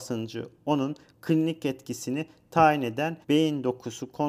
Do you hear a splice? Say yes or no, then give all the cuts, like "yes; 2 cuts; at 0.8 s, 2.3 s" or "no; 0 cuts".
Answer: yes; 1 cut; at 3.2 s